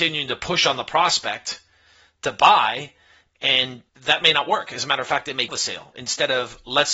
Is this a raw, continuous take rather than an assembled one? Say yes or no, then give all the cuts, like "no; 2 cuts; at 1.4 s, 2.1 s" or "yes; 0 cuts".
no; 2 cuts; at 3.9 s, 5.5 s